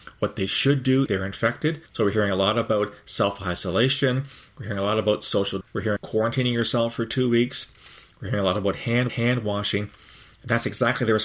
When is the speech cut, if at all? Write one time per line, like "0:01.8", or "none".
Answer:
0:01.1
0:01.9
0:05.6
0:06.0
0:09.1